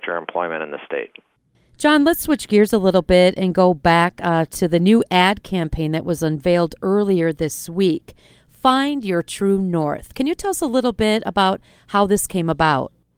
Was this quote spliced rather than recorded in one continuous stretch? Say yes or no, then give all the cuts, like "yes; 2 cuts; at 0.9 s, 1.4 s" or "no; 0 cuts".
no; 0 cuts